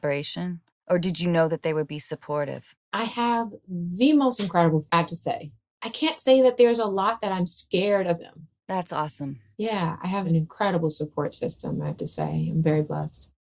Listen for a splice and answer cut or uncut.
cut